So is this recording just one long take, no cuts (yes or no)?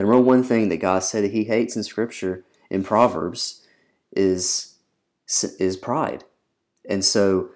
yes